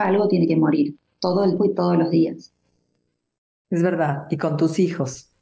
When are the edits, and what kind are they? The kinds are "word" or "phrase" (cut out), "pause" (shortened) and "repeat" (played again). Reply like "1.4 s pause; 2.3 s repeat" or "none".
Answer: 1.6 s word